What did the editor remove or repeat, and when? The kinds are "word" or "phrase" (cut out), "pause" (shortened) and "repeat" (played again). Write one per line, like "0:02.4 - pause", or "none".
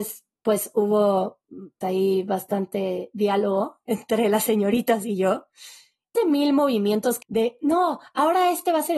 0:01.8 - word
0:06.1 - word
0:07.2 - word